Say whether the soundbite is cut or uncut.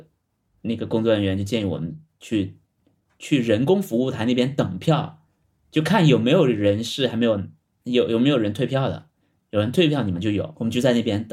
uncut